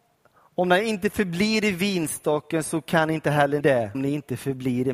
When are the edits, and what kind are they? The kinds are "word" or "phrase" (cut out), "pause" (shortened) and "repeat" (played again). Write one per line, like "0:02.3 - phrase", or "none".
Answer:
0:03.6 - word
0:03.9 - word